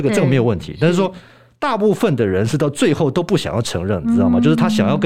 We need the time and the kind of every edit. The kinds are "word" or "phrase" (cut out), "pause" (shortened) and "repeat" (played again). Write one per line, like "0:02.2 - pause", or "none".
none